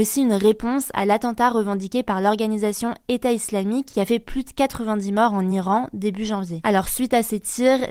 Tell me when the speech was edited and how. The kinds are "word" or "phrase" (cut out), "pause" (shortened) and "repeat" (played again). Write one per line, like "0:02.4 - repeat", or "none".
none